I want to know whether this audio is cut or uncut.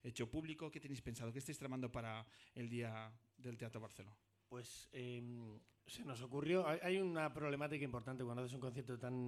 uncut